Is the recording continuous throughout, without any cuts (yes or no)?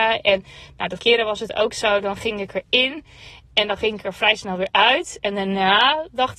no